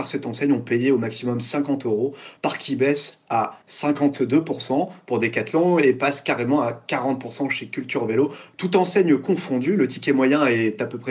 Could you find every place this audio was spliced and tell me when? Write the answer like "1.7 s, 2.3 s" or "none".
none